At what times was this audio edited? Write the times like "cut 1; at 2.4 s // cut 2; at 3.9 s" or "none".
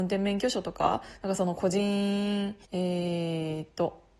cut 1; at 2.6 s